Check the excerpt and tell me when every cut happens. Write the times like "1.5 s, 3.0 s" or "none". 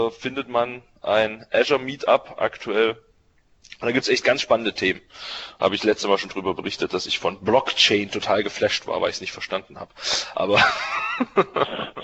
none